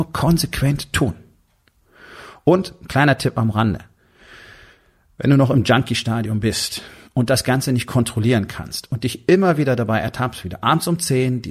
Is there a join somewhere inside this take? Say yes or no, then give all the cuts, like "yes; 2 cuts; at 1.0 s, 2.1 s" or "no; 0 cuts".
no; 0 cuts